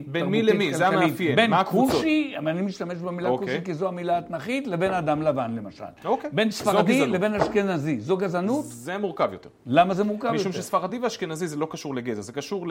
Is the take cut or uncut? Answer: uncut